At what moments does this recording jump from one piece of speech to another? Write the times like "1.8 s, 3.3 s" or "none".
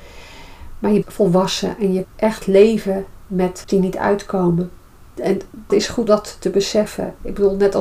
1.0 s, 2.0 s, 3.7 s, 5.7 s, 6.1 s

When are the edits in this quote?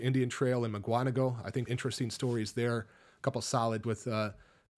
1.7 s, 3.8 s

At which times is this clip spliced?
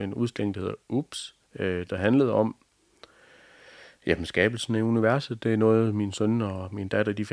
1.4 s

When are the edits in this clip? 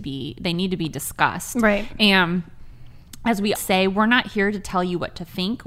3.5 s

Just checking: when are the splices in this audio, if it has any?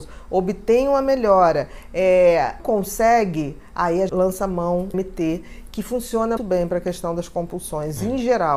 2.6 s, 4.1 s, 4.9 s, 6.4 s

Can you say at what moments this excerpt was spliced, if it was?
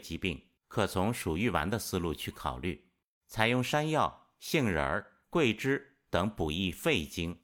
none

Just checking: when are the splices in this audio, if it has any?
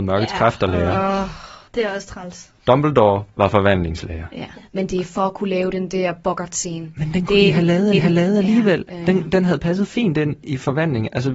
1.7 s, 3.3 s, 4.6 s, 7.9 s

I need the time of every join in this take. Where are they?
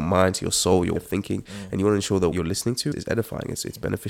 1.0 s, 2.3 s, 2.9 s

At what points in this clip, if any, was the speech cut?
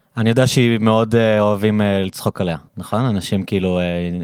2.7 s

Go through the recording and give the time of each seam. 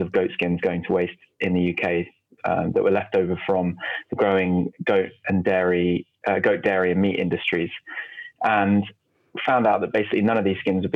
none

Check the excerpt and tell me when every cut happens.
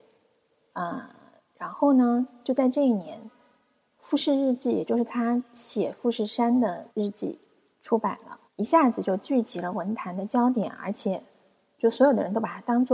6.9 s, 8.5 s

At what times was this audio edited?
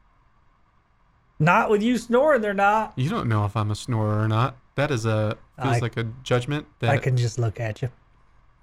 none

